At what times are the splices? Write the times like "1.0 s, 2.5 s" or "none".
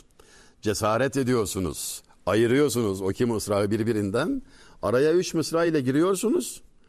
none